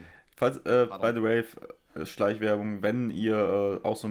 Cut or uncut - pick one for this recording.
uncut